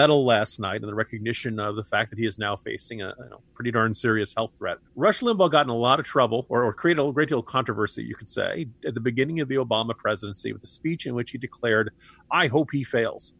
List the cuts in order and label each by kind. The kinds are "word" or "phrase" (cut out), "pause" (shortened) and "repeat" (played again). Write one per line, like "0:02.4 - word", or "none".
0:03.5 - pause
0:04.8 - pause